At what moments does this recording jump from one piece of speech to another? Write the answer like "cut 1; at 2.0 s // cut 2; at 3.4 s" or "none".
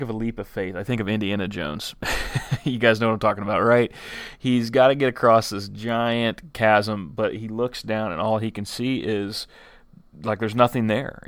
none